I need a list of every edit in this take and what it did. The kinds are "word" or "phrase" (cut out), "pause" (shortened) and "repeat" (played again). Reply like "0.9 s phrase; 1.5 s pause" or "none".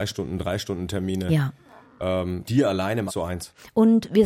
2.4 s word; 3.1 s word